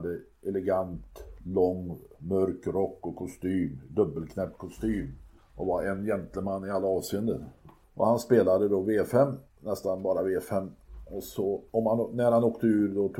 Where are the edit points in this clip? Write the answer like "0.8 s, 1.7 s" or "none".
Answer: 5.4 s, 7.8 s, 9.5 s, 11.7 s